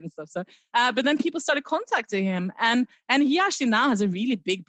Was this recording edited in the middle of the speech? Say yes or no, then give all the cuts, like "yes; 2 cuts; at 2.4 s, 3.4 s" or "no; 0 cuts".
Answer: no; 0 cuts